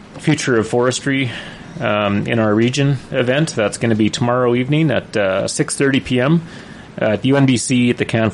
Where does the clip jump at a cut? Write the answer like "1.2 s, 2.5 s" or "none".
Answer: none